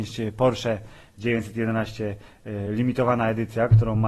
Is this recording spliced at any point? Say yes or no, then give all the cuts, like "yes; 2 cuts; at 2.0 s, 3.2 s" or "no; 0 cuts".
no; 0 cuts